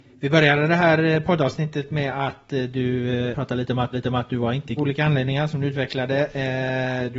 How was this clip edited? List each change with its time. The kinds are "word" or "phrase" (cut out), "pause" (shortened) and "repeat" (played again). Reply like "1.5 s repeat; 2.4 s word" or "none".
3.3 s word; 3.9 s repeat; 4.8 s phrase